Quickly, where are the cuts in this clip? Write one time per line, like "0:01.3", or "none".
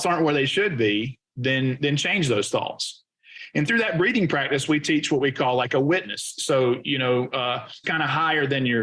0:07.8